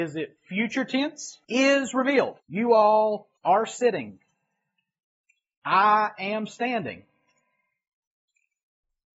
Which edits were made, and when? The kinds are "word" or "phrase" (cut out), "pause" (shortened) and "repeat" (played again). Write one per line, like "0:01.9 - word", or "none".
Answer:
0:01.4 - pause
0:02.4 - pause
0:03.4 - pause